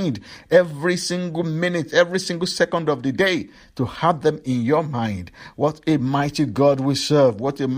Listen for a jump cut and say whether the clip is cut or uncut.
uncut